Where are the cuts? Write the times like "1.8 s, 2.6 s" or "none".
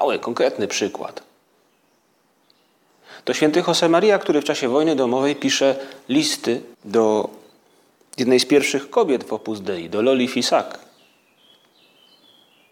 6.7 s

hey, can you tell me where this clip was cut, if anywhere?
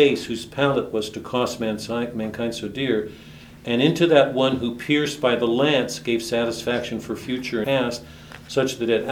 7.6 s

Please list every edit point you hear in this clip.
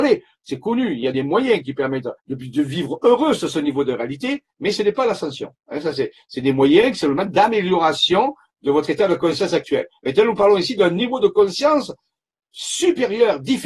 2.2 s, 4.5 s

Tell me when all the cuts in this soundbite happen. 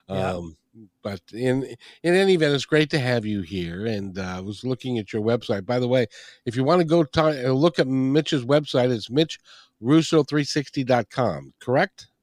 none

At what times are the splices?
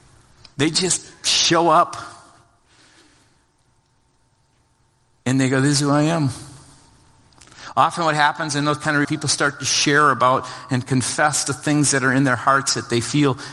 9.0 s

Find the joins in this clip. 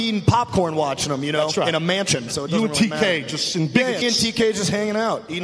4.0 s

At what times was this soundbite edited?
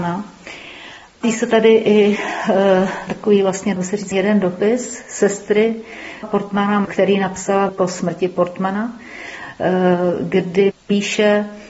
1.2 s, 3.1 s, 3.8 s, 4.1 s, 6.2 s, 7.7 s, 10.7 s

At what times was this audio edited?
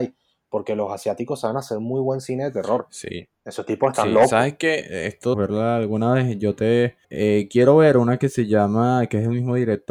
3.4 s, 5.3 s, 7.0 s

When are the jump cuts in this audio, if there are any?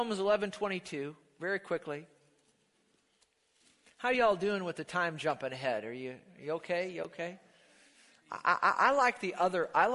none

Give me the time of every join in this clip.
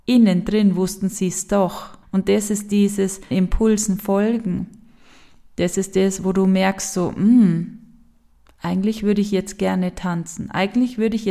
2.0 s, 3.3 s

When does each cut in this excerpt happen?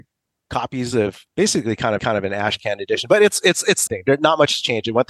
1.3 s, 2.0 s, 3.9 s

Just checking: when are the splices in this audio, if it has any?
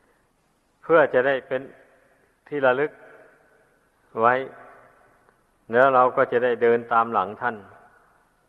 none

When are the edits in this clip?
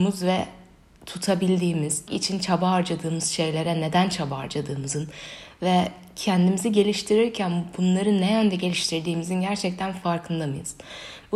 2.1 s

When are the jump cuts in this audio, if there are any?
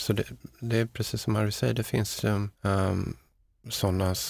2.5 s

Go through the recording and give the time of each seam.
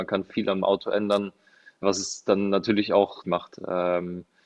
1.8 s, 3.2 s

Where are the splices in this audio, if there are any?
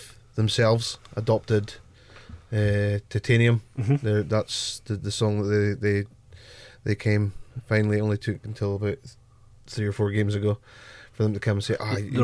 none

